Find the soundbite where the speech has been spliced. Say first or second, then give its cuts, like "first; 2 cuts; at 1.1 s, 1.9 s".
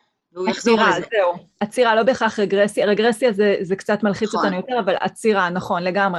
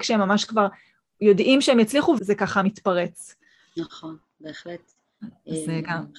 second; 1 cut; at 2.2 s